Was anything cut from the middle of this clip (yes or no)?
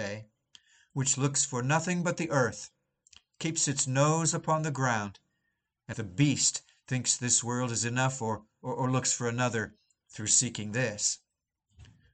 yes